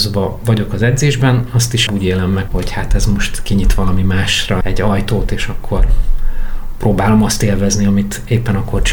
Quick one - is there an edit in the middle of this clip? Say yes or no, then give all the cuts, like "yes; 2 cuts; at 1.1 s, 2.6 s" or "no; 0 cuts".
yes; 3 cuts; at 1.9 s, 2.5 s, 4.6 s